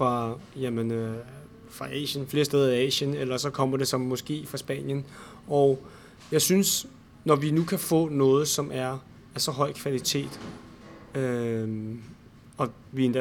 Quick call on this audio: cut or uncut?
uncut